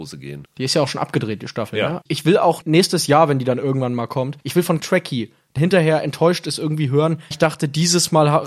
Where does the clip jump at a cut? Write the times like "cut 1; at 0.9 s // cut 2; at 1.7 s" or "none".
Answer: cut 1; at 4.8 s // cut 2; at 5.6 s // cut 3; at 7.3 s